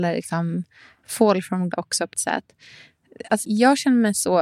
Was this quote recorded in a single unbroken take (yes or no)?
no